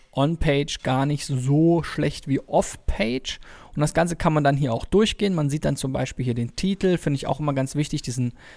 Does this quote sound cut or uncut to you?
uncut